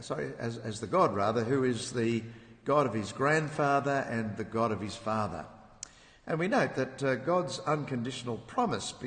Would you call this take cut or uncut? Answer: uncut